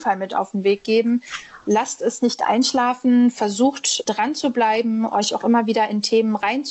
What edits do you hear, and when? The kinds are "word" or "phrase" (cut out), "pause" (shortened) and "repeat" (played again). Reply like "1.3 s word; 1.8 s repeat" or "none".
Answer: none